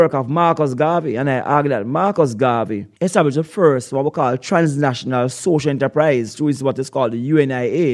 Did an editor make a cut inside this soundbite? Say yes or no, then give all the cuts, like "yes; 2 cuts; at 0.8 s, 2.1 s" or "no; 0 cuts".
yes; 1 cut; at 2.9 s